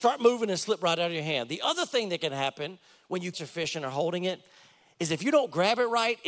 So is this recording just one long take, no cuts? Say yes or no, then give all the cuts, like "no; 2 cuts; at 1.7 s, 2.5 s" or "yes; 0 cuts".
no; 1 cut; at 3.3 s